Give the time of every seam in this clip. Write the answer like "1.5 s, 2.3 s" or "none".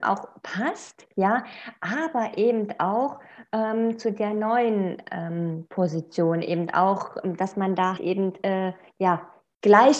8.0 s